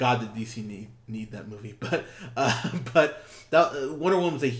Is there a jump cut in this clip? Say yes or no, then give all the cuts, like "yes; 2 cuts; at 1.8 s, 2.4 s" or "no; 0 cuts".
no; 0 cuts